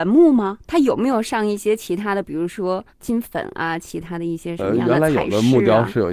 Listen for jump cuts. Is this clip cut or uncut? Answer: uncut